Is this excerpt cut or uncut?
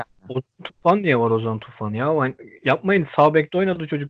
uncut